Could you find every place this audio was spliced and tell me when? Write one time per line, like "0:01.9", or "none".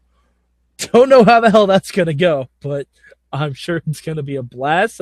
none